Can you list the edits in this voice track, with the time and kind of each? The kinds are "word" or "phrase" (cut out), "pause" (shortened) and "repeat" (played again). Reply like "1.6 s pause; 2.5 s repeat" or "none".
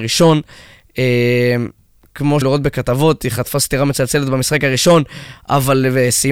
2.4 s word